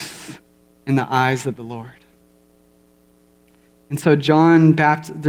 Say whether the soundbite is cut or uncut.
uncut